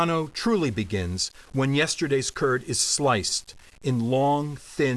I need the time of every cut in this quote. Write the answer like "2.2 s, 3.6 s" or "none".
none